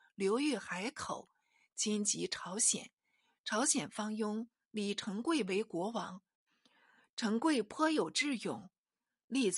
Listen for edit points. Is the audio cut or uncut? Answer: uncut